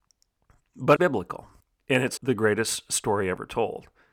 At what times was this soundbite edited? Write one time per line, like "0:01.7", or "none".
0:01.0
0:01.6
0:02.2